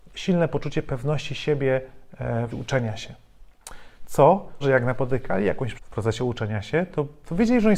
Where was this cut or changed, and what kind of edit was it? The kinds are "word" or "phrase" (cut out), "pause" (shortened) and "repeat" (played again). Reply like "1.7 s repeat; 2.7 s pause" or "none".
2.5 s word; 4.6 s word; 5.8 s word

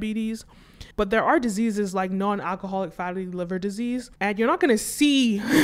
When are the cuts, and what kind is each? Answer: 0.9 s pause; 4.2 s pause

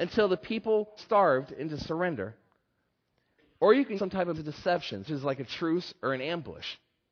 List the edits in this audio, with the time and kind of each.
1.0 s word; 4.0 s word; 4.3 s word; 5.1 s word

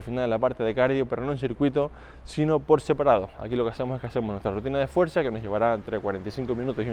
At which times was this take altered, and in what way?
none

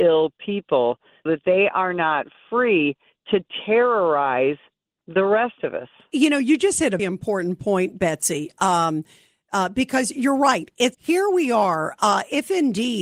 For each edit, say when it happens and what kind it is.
1.3 s word; 7.0 s word; 10.9 s word

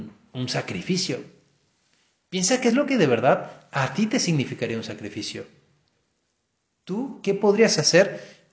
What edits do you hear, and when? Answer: none

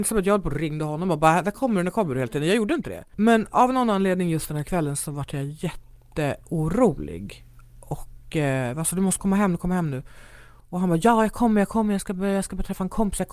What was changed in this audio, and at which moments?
none

